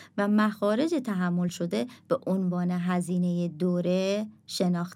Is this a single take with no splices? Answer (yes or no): yes